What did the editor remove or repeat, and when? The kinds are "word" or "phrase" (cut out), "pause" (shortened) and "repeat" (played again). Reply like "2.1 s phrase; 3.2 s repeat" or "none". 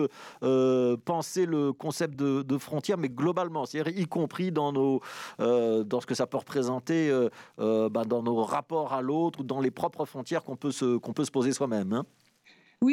none